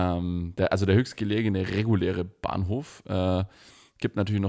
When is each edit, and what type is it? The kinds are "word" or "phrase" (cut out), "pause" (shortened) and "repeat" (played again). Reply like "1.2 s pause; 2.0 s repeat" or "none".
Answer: none